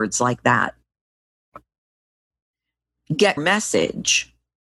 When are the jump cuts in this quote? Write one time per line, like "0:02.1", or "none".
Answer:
0:03.4